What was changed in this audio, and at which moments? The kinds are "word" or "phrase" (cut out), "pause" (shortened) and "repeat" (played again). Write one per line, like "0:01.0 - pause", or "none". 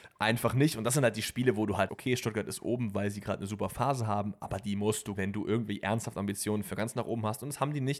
0:01.9 - word
0:05.2 - word